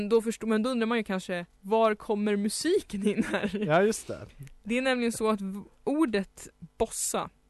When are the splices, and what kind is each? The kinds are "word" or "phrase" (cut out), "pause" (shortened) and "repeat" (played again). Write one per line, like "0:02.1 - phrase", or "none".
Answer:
0:06.5 - pause